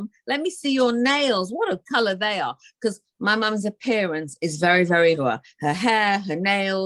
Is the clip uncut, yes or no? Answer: no